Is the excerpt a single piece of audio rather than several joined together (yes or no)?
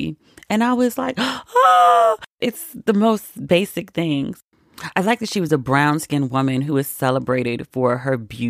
yes